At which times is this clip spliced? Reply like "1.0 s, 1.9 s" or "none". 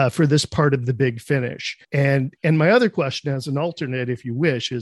1.8 s

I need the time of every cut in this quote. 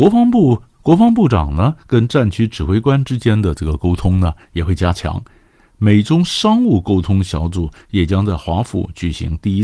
none

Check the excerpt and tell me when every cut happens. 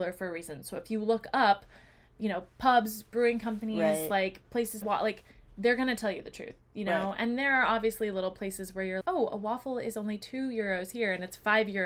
4.8 s, 9.0 s

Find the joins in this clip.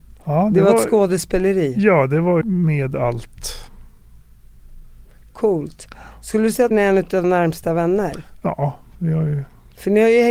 2.4 s, 6.7 s, 7.2 s

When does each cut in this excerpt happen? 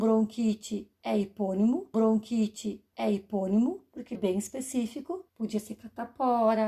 1.9 s, 4.1 s, 5.3 s

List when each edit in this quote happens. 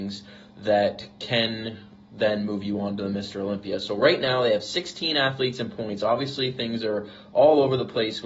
none

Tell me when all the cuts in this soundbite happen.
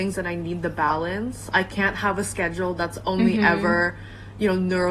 none

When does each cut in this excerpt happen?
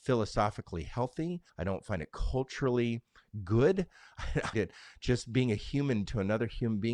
1.5 s, 4.5 s, 6.0 s

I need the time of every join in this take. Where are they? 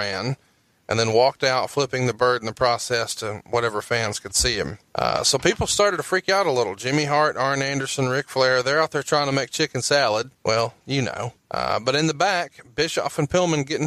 4.9 s, 10.3 s, 11.4 s

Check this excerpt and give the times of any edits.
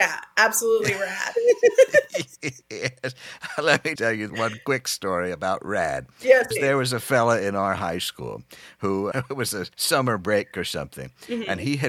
4.0 s, 4.3 s, 6.5 s, 9.1 s, 9.7 s

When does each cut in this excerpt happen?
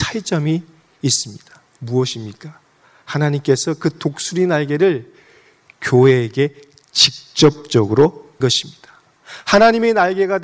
8.4 s

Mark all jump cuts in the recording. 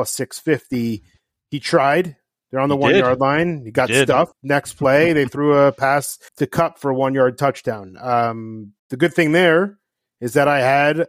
4.3 s, 6.3 s, 8.8 s

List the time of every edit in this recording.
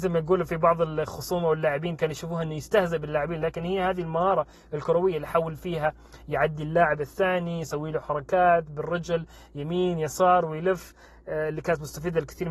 none

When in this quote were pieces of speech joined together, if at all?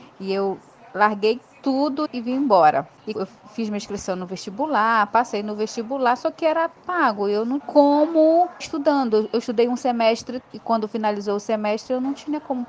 2.1 s, 3.1 s, 7.6 s, 8.6 s, 10.4 s

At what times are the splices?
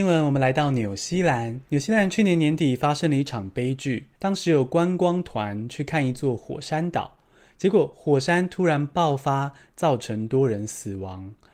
1.7 s, 4.2 s

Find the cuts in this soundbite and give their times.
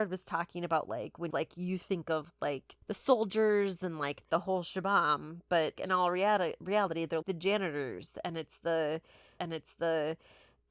1.3 s, 2.8 s, 4.2 s, 5.8 s, 7.2 s, 9.4 s

